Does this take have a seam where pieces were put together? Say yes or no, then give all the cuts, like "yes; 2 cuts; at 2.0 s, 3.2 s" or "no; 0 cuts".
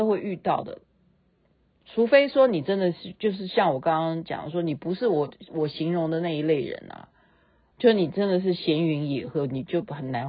yes; 1 cut; at 7.7 s